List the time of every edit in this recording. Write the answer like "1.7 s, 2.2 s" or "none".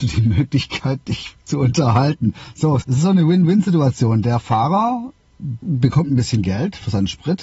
1.4 s, 2.8 s, 5.6 s